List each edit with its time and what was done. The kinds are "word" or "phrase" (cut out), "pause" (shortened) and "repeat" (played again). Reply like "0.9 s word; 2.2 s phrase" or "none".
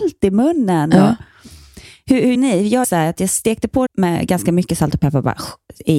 2.3 s word; 2.8 s word; 3.9 s word